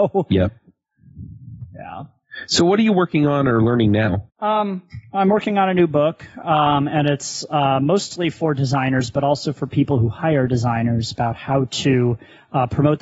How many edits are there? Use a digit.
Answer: 1